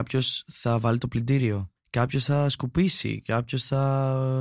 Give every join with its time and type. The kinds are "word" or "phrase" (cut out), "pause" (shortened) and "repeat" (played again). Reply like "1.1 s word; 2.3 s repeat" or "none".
none